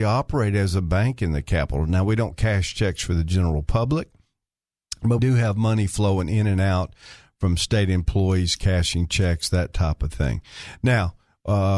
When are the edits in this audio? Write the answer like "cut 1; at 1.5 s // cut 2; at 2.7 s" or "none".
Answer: cut 1; at 5.2 s